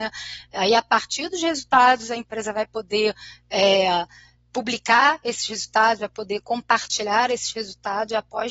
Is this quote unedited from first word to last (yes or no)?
yes